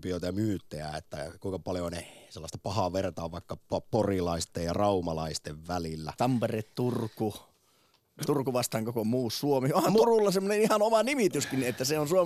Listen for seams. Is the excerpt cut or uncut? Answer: uncut